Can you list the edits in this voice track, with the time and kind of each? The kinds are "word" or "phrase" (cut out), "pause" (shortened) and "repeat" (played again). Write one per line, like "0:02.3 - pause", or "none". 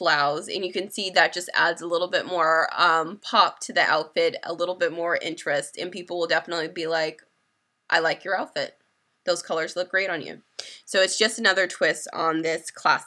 none

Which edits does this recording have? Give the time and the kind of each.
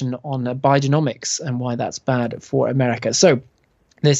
none

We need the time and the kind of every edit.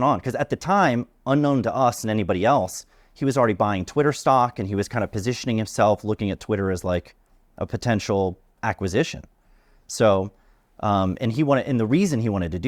none

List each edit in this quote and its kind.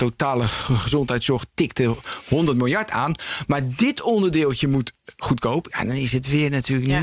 none

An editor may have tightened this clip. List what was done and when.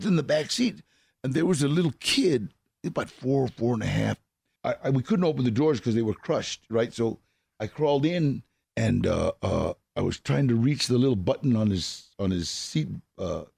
none

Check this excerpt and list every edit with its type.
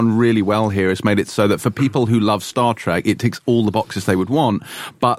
none

